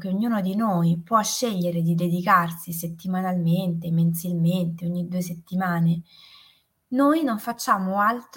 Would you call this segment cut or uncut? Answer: uncut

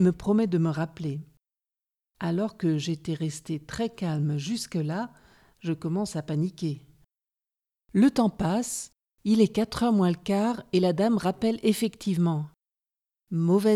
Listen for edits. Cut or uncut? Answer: uncut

